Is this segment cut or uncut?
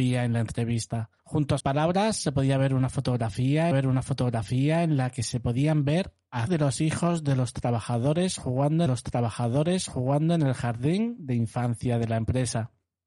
cut